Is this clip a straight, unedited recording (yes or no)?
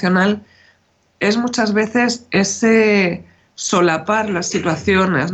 yes